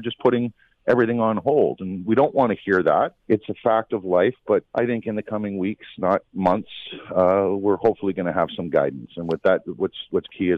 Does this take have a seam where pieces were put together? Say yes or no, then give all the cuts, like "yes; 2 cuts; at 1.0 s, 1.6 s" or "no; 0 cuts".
yes; 2 cuts; at 3.2 s, 4.7 s